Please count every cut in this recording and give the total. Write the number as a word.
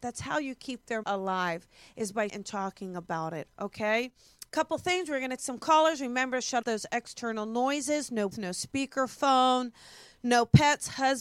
six